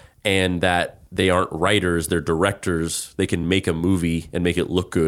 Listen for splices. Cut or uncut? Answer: uncut